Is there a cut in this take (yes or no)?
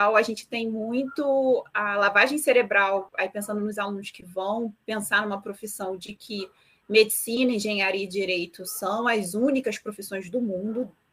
no